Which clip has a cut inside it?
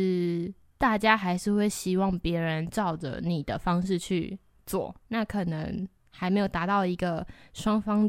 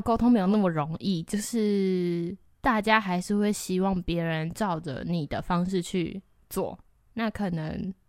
first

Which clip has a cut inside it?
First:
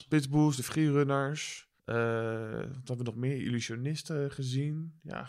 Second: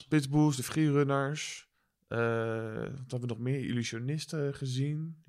first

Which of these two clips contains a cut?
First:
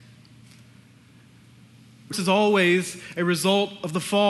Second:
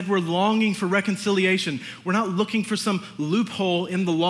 first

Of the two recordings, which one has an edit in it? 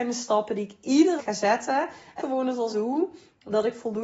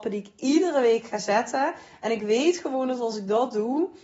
first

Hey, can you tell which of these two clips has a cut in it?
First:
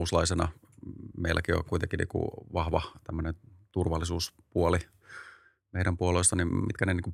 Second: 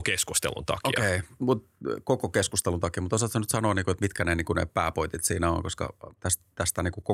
second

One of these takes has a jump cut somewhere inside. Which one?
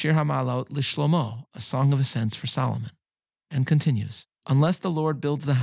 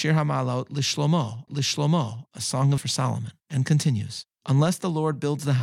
second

